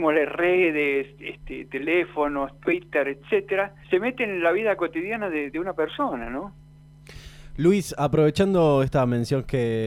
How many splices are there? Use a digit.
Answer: 2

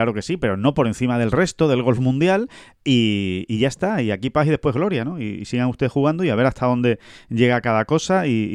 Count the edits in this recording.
0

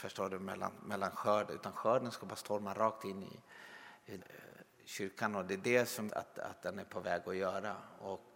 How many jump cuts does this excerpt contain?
2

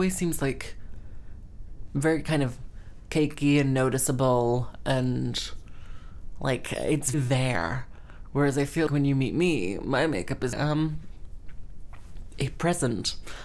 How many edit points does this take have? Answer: 3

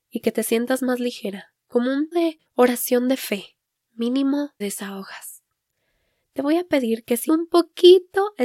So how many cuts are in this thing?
4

